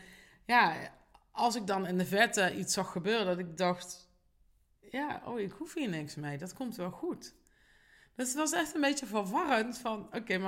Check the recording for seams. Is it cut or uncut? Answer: uncut